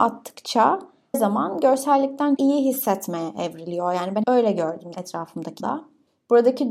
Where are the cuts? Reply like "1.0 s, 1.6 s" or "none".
1.1 s, 2.4 s, 4.2 s, 4.9 s, 5.6 s